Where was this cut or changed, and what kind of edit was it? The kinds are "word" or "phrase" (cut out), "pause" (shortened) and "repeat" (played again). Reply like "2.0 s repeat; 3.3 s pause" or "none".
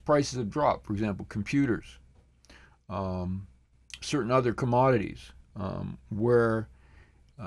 none